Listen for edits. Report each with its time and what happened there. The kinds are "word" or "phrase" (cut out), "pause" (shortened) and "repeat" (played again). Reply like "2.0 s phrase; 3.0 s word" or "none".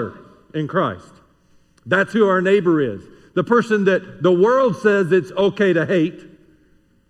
none